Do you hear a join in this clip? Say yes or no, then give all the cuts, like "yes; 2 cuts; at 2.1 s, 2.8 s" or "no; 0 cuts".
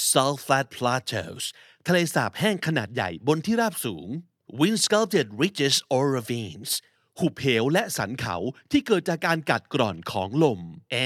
no; 0 cuts